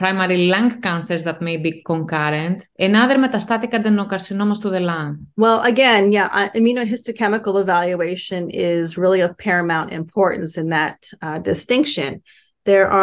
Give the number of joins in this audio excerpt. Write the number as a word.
one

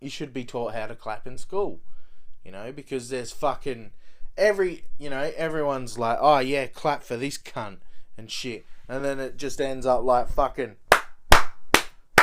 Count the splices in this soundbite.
zero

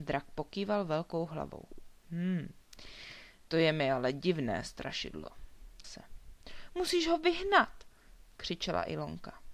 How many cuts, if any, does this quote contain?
one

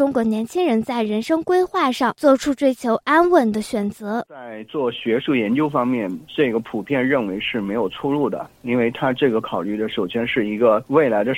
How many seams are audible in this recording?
one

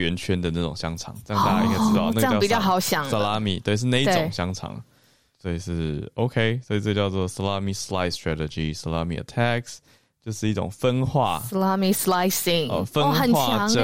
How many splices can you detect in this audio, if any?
zero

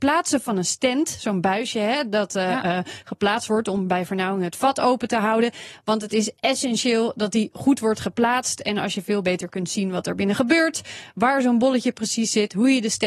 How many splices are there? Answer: zero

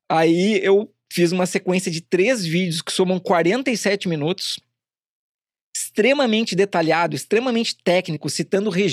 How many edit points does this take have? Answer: zero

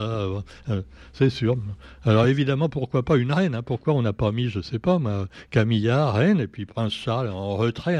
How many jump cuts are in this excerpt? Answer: zero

